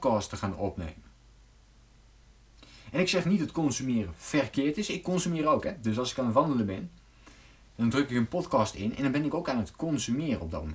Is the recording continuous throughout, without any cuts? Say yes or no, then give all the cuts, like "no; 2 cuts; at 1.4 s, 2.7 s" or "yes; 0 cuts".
yes; 0 cuts